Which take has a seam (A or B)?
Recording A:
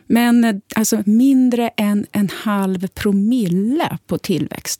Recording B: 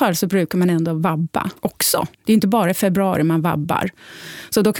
B